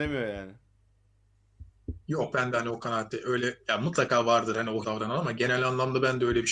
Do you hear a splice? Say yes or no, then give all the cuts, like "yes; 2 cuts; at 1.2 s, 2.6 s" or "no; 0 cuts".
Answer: yes; 1 cut; at 4.8 s